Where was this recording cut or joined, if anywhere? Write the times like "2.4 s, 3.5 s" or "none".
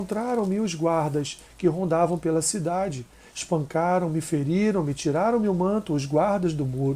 none